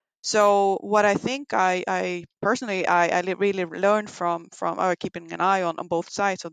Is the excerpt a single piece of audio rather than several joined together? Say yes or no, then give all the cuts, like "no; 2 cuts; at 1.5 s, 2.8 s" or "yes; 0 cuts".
yes; 0 cuts